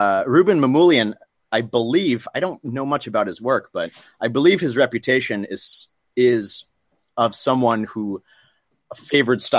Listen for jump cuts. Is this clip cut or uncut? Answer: uncut